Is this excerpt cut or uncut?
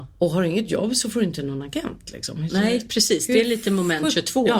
uncut